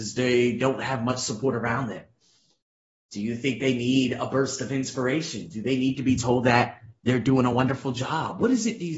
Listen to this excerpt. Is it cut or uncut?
uncut